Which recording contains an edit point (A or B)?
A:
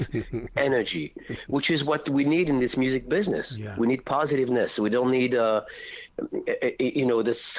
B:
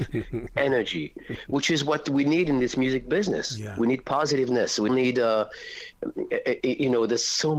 B